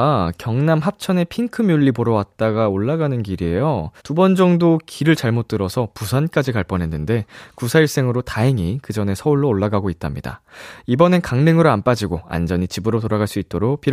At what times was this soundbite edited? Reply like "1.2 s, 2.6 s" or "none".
4.0 s